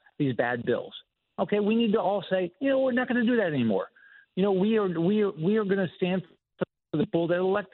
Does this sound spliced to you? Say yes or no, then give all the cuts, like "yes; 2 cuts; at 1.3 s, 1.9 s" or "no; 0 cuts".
no; 0 cuts